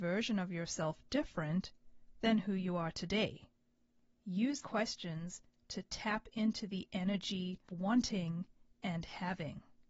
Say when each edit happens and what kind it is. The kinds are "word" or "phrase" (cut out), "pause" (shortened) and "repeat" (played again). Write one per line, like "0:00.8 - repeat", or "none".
0:04.6 - word
0:07.7 - word